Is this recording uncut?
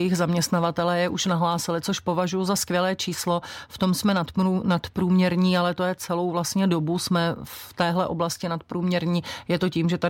yes; 0 cuts

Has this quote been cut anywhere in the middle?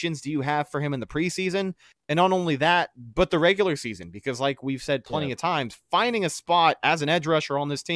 no; 0 cuts

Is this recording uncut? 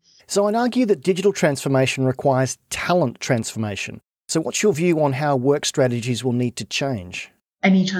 yes; 0 cuts

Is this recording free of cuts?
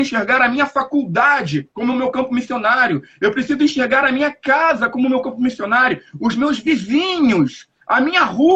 yes; 0 cuts

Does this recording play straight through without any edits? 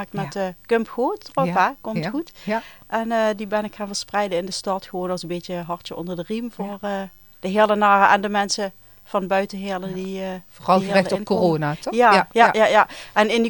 yes; 0 cuts

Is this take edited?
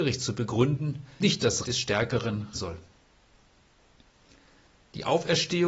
yes; 3 cuts; at 1.2 s, 1.6 s, 2.5 s

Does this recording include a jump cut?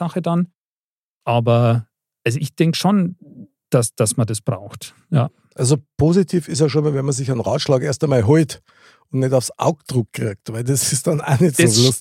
no; 0 cuts

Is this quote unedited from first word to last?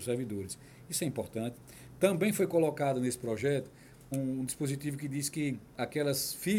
no; 2 cuts; at 4.1 s, 5.7 s

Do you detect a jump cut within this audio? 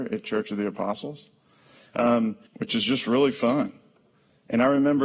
yes; 1 cut; at 2.5 s

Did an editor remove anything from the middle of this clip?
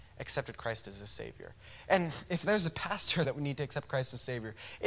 yes; 2 cuts; at 2.3 s, 3.2 s

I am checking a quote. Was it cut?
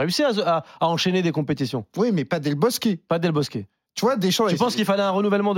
no; 0 cuts

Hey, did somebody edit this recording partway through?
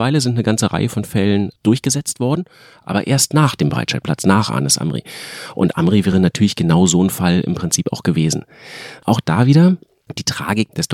no; 0 cuts

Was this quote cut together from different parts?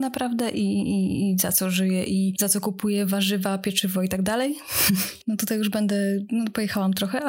no; 0 cuts

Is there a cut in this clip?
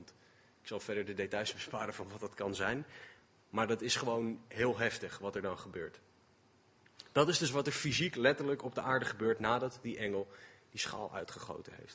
no; 0 cuts

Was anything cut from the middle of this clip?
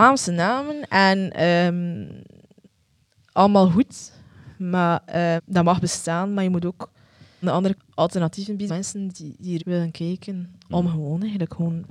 yes; 6 cuts; at 5.4 s, 7.4 s, 7.7 s, 8.7 s, 9.1 s, 9.6 s

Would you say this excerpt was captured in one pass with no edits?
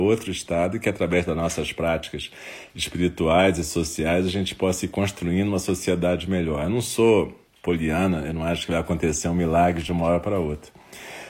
yes; 0 cuts

